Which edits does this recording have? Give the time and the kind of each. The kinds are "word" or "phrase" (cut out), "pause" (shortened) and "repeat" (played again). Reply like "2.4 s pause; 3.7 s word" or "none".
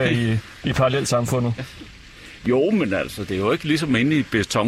1.6 s word